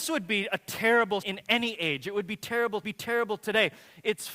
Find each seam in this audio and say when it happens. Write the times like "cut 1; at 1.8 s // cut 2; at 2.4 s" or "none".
cut 1; at 1.2 s // cut 2; at 2.8 s